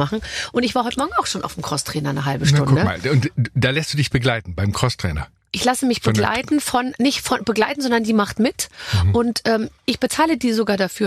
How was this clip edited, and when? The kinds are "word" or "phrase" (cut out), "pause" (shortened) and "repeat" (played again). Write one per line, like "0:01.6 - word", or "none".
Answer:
none